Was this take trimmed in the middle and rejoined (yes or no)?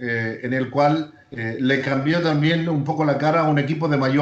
no